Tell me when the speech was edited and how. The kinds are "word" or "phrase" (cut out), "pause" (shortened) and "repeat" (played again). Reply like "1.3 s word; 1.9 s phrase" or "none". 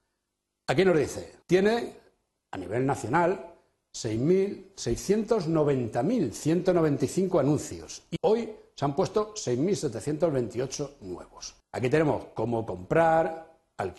1.4 s pause; 8.2 s word; 11.6 s pause